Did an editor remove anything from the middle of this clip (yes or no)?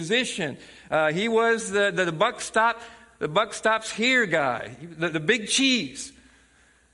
no